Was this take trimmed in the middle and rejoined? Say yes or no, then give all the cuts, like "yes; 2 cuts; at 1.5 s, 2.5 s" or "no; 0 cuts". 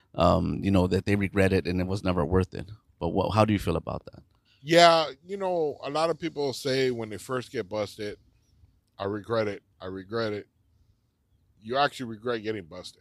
yes; 1 cut; at 4.4 s